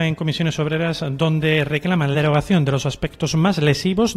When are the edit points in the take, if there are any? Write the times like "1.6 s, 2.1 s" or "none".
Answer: 2.1 s